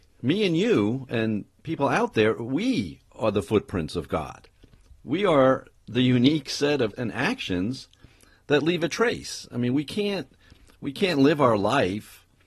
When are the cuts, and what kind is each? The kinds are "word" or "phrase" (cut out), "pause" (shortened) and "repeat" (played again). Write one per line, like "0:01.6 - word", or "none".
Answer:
0:06.9 - word

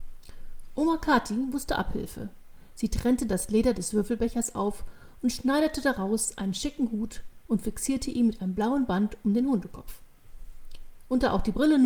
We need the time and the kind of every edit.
none

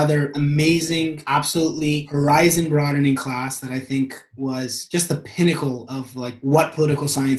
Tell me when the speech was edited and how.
none

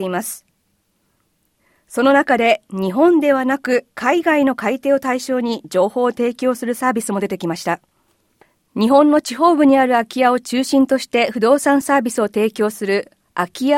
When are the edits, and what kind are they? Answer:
0:03.9 - pause

